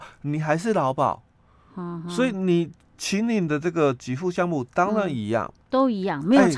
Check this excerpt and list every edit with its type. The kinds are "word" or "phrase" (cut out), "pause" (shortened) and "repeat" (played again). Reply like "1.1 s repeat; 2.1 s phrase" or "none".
none